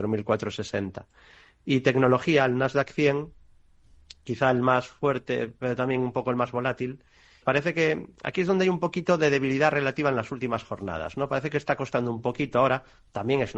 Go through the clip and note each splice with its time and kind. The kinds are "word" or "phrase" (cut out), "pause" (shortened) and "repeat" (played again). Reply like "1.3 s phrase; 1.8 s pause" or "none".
7.4 s word